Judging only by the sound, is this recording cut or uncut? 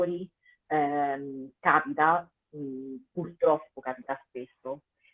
uncut